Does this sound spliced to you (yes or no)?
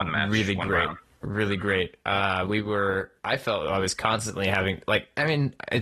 yes